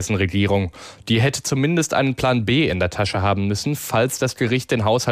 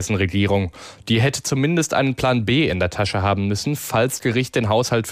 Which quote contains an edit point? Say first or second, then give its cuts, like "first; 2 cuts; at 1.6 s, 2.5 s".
second; 1 cut; at 4.2 s